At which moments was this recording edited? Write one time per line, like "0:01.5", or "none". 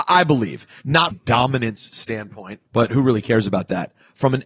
0:01.1
0:02.7